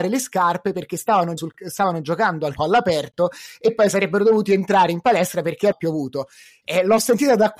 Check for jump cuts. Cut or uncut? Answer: cut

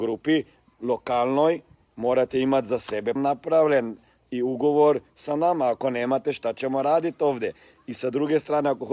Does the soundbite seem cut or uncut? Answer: cut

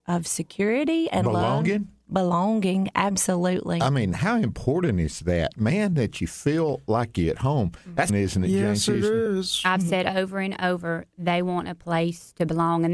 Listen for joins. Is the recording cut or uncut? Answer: cut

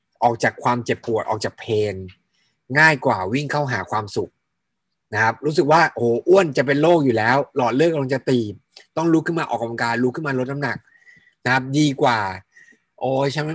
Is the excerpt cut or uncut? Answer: uncut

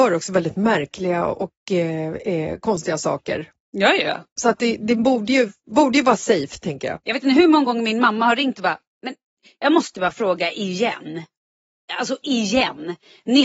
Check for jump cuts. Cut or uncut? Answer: uncut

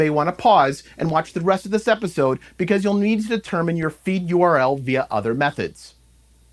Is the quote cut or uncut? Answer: uncut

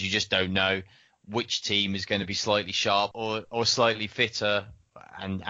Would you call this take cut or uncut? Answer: uncut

